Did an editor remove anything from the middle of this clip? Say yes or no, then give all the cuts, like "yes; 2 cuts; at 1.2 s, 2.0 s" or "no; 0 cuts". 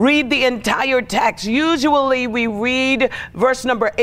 no; 0 cuts